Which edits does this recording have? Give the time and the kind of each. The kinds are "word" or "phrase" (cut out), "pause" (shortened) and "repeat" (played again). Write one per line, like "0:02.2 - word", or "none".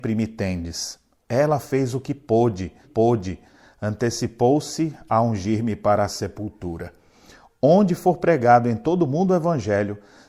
0:02.8 - repeat